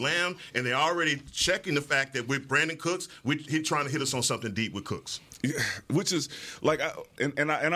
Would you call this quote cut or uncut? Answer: uncut